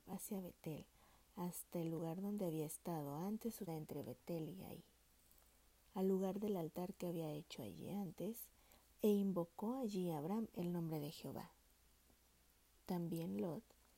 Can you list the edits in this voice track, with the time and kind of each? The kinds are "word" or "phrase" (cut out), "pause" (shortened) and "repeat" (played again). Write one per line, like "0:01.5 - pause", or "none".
0:03.7 - word

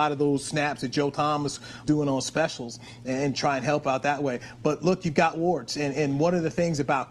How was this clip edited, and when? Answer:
0:01.8 - word

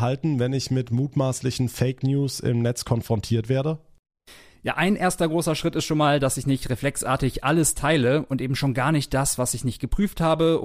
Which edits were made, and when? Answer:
none

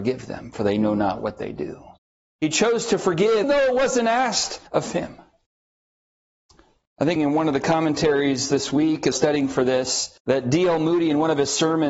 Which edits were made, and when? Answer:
0:02.0 - pause
0:03.4 - word
0:04.7 - pause
0:07.2 - phrase
0:09.1 - phrase
0:10.2 - pause

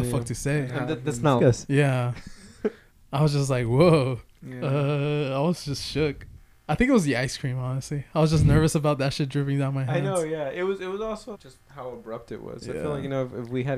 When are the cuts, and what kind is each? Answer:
0:01.4 - word
0:03.0 - word
0:11.3 - word

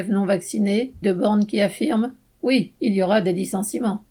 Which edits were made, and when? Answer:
0:01.0 - word

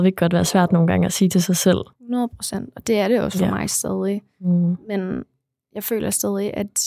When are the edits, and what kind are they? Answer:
0:01.9 - pause

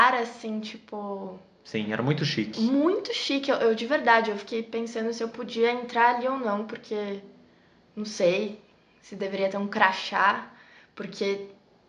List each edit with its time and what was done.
none

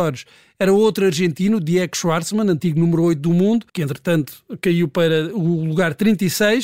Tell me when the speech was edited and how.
0:03.7 - pause

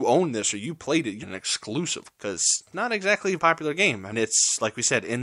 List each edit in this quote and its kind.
0:01.2 - word
0:02.1 - word
0:02.7 - word
0:03.4 - word
0:04.1 - word

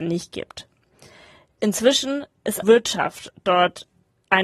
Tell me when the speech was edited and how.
0:02.6 - word

